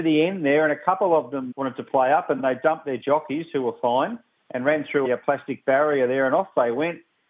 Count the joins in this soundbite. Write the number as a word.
two